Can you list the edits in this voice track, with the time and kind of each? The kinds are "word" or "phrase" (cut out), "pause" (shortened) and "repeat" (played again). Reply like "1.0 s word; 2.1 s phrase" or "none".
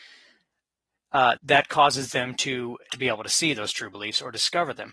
1.4 s word; 2.9 s word